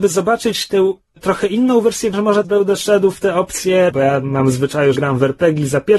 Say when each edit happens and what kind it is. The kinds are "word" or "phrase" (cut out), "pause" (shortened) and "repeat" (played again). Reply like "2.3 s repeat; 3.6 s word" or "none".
1.2 s word; 2.1 s word; 2.4 s word; 3.9 s word; 5.0 s word

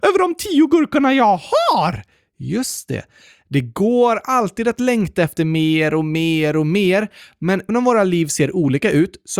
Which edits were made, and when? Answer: 7.7 s word

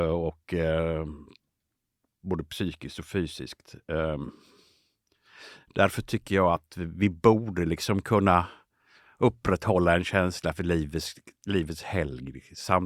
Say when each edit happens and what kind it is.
none

